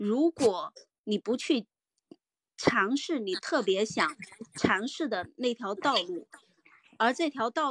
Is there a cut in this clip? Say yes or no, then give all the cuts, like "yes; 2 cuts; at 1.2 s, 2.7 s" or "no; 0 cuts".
no; 0 cuts